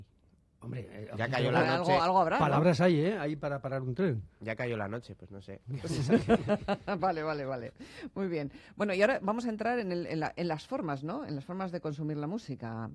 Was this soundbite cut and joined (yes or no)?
no